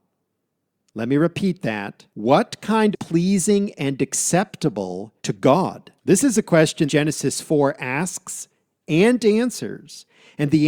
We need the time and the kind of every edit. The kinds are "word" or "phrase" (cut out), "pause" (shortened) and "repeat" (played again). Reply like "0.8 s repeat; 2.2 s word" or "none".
2.1 s pause; 2.9 s phrase; 5.2 s pause; 6.0 s pause; 6.9 s word